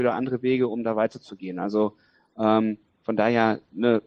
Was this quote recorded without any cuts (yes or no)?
yes